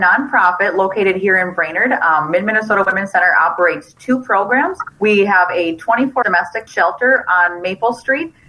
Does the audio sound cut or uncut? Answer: cut